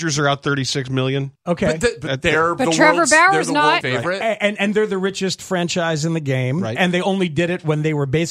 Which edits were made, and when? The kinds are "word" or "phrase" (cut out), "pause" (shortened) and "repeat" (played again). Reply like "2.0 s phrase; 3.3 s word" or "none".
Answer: 1.4 s pause; 3.8 s word

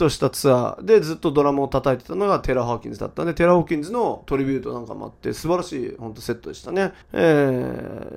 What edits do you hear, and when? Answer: 7.0 s pause

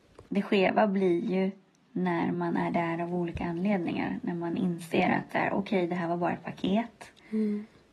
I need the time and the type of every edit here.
none

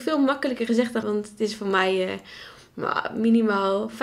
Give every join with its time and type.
1.0 s word

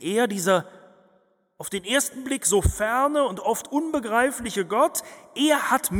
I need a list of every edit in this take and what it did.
none

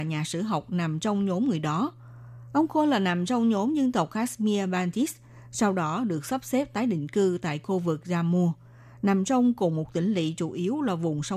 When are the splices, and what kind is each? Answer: none

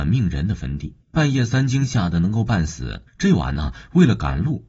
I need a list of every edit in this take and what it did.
1.0 s pause; 3.1 s pause

